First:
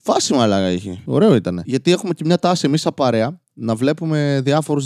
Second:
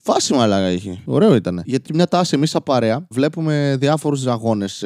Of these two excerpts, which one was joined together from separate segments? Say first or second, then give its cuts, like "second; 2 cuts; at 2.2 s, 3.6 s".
second; 2 cuts; at 1.8 s, 3.1 s